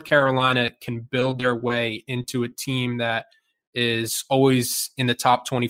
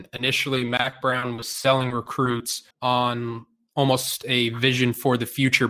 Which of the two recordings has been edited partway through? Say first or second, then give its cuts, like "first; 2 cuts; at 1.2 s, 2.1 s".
second; 1 cut; at 2.7 s